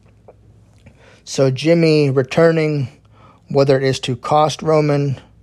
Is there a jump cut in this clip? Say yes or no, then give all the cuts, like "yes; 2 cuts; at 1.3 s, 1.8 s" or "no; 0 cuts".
no; 0 cuts